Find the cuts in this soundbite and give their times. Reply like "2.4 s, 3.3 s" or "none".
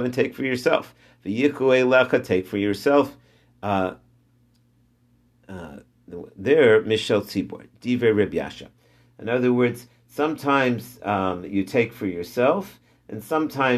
none